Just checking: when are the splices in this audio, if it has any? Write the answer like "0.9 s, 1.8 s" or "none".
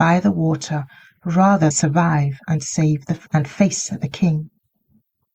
1.7 s, 3.3 s

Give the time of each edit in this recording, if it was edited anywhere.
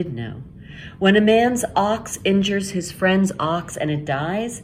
none

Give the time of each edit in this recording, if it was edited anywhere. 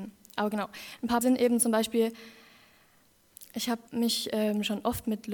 1.2 s, 3.9 s

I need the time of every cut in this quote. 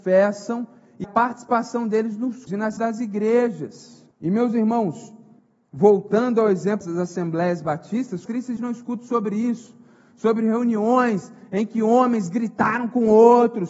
1.0 s, 2.5 s, 2.8 s, 4.1 s, 5.4 s, 6.8 s, 8.3 s, 8.6 s

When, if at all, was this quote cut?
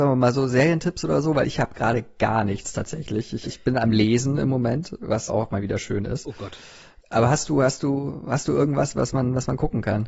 3.4 s, 5.3 s

